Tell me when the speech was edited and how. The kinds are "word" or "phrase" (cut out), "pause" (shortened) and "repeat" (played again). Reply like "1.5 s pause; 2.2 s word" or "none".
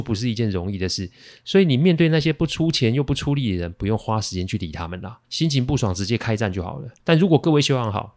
5.2 s pause; 7.0 s pause